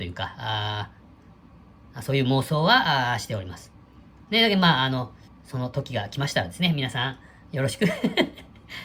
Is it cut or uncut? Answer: cut